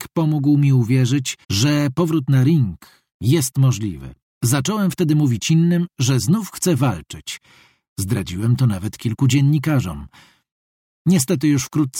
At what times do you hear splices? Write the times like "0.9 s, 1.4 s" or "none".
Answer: 1.4 s, 4.2 s